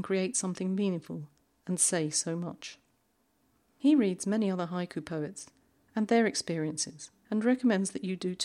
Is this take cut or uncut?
uncut